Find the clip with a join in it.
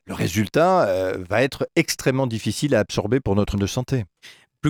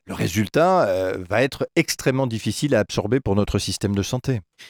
first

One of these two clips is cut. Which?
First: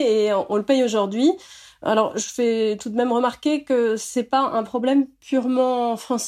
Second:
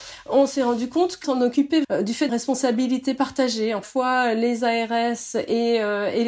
second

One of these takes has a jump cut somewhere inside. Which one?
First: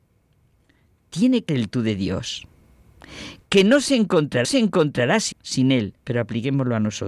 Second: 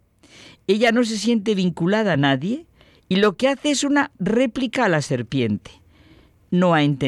first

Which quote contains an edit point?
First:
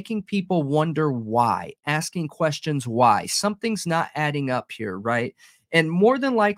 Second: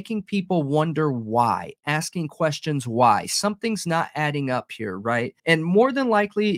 second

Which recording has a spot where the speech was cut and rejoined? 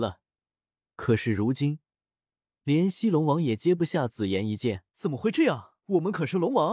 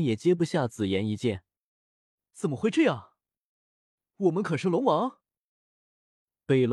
first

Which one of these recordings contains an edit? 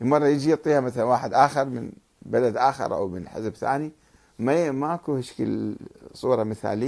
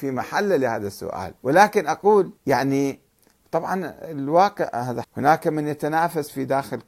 second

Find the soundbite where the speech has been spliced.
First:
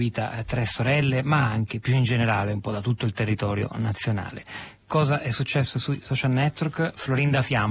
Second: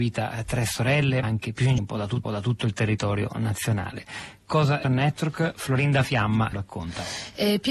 second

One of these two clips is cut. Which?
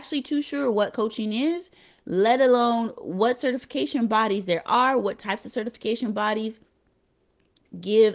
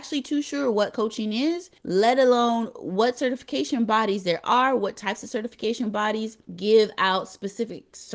second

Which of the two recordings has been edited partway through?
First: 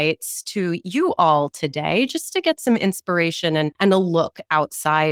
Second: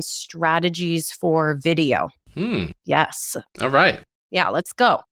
second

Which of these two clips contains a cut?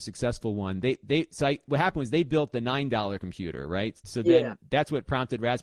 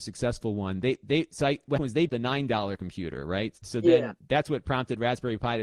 second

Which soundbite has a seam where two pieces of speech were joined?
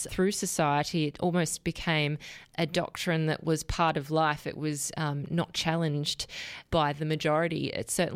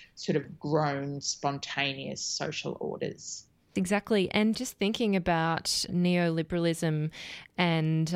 second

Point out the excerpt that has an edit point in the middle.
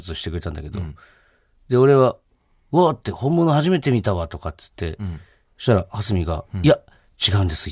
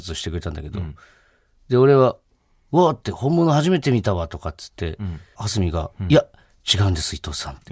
second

